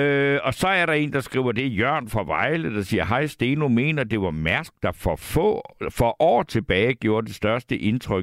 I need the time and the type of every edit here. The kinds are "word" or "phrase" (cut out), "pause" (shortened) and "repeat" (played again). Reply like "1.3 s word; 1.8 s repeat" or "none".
none